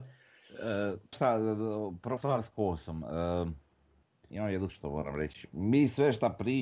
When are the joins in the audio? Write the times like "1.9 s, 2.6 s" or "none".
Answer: 1.1 s, 2.2 s, 4.3 s, 4.7 s